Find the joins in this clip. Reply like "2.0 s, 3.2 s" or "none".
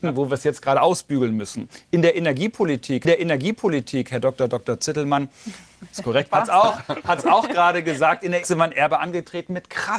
3.0 s, 6.3 s, 8.4 s